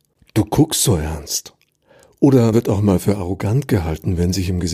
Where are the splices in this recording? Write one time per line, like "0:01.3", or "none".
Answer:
0:02.5